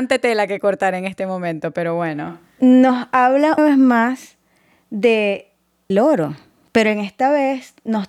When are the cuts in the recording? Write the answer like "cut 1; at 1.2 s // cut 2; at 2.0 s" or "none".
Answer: cut 1; at 3.6 s // cut 2; at 5.9 s